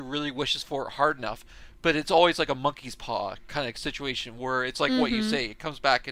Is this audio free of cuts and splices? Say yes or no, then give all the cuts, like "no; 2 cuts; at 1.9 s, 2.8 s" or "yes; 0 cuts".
yes; 0 cuts